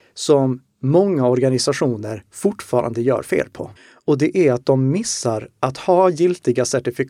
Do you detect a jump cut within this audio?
yes; 1 cut; at 3.8 s

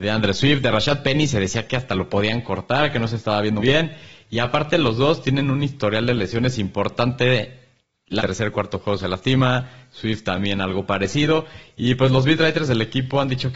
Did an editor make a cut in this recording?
yes; 2 cuts; at 3.6 s, 8.2 s

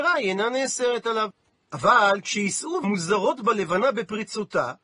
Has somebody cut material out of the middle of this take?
yes; 1 cut; at 2.8 s

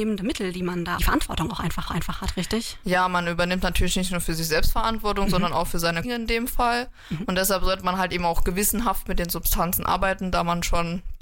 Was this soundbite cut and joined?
yes; 3 cuts; at 1.0 s, 1.9 s, 6.0 s

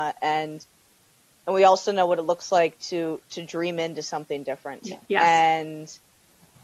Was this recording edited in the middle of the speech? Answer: yes; 1 cut; at 5.0 s

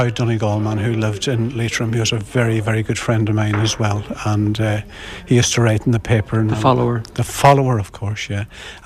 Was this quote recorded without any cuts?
yes; 0 cuts

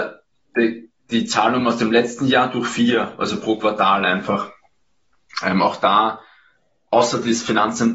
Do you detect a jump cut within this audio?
no; 0 cuts

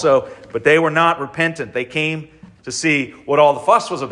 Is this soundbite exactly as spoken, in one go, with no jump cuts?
yes; 0 cuts

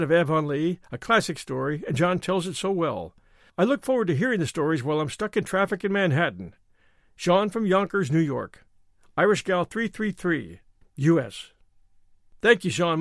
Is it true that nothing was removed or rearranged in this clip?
yes; 0 cuts

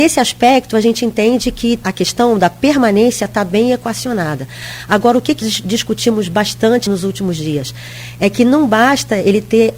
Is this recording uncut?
no; 3 cuts; at 1.8 s, 5.4 s, 6.9 s

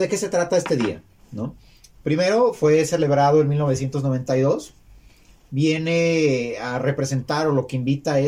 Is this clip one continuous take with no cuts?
yes; 0 cuts

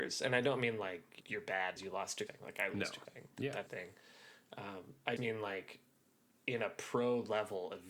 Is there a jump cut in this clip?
yes; 6 cuts; at 1.2 s, 1.8 s, 2.3 s, 3.0 s, 3.7 s, 5.2 s

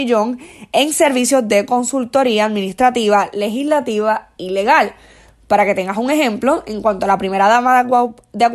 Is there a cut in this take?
no; 0 cuts

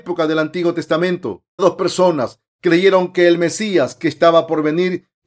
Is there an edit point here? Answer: yes; 1 cut; at 1.6 s

